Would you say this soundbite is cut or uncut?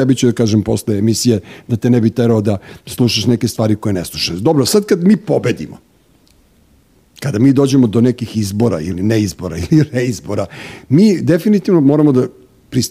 uncut